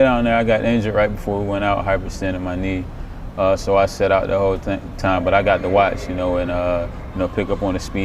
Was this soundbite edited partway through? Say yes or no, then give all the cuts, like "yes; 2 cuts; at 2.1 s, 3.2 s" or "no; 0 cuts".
no; 0 cuts